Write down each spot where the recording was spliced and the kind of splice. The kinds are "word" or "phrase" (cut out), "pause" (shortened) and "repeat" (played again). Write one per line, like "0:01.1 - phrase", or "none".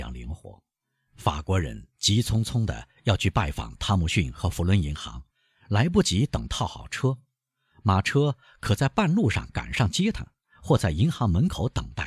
none